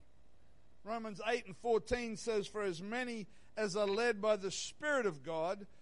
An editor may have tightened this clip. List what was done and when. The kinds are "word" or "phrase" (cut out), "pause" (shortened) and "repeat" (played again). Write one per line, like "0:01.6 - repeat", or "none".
none